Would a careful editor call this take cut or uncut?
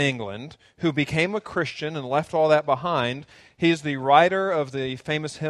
uncut